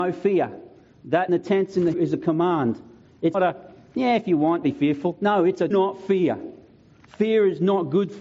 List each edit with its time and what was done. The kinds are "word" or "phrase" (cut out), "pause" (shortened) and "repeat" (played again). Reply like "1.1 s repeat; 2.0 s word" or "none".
1.3 s word; 1.9 s word; 3.3 s word; 4.6 s word; 5.7 s word

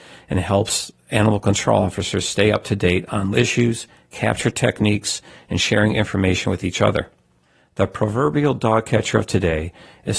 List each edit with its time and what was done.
3.3 s word

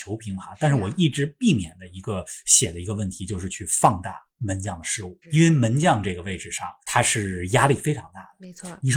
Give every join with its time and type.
5.2 s pause

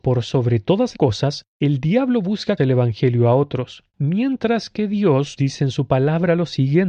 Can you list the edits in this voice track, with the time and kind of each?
0.9 s word; 2.6 s phrase; 3.9 s pause; 5.4 s word

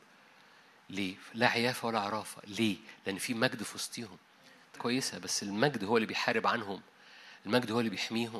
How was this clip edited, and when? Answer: 4.8 s phrase

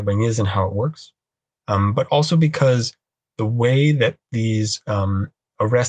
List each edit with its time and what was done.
none

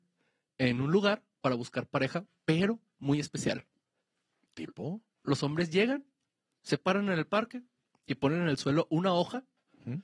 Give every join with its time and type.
none

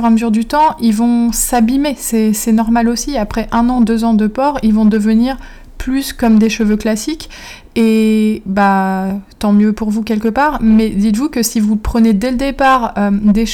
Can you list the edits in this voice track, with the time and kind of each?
none

